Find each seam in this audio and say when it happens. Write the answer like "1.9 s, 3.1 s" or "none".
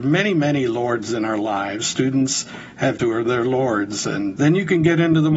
3.0 s, 4.4 s